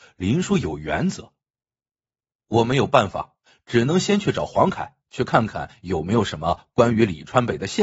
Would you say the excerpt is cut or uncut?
uncut